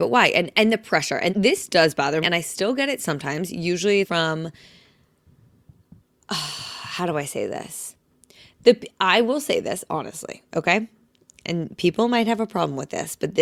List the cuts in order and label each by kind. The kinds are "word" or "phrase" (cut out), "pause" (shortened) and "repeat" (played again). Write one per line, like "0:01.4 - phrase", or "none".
0:01.3 - word
0:02.2 - word
0:04.0 - word

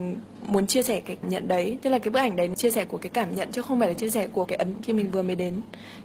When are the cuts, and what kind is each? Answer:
0:01.2 - word
0:02.5 - word
0:04.4 - word
0:04.7 - word

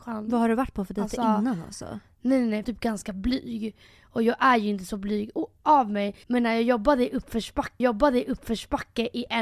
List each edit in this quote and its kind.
0:02.6 - phrase
0:06.2 - pause
0:07.8 - repeat

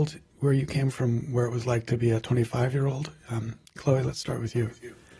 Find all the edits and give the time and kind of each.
0:00.9 - word

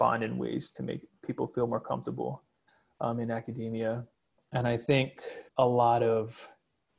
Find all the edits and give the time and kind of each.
0:04.1 - pause
0:05.5 - pause

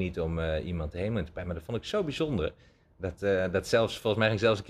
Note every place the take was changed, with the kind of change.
none

